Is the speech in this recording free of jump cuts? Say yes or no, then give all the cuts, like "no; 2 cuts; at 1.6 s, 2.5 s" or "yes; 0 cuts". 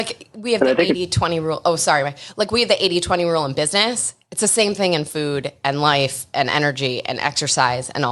yes; 0 cuts